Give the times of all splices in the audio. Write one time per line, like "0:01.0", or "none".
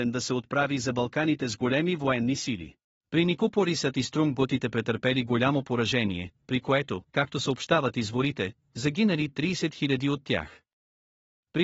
0:02.8
0:07.1